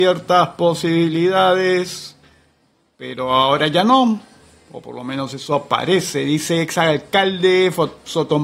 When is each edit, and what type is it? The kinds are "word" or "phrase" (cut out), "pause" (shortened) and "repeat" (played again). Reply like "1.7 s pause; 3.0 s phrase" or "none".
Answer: none